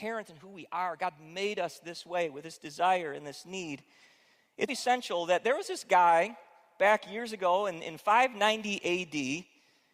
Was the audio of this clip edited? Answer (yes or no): yes